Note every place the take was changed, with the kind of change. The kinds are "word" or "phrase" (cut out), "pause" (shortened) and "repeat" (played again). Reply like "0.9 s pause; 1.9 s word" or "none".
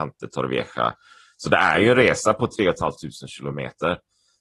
none